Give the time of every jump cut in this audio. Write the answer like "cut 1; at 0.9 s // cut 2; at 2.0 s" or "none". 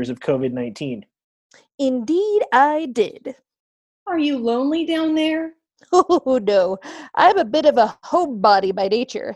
none